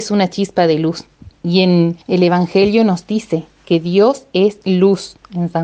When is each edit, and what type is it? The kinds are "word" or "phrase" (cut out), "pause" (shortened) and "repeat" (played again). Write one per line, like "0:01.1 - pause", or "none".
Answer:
0:01.4 - pause
0:02.0 - pause